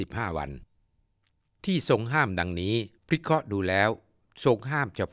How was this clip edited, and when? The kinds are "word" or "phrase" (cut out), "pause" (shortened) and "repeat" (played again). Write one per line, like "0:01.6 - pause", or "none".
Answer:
0:03.0 - pause